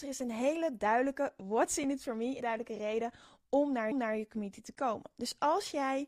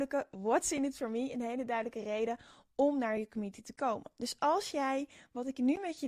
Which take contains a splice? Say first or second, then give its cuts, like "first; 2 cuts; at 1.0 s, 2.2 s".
first; 2 cuts; at 2.4 s, 3.9 s